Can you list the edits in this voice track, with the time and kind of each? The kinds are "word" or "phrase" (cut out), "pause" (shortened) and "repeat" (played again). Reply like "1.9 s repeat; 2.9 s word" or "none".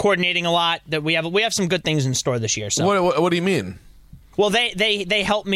none

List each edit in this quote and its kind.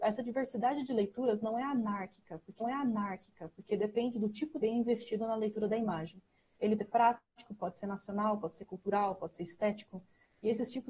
2.6 s repeat; 4.6 s word; 6.8 s word

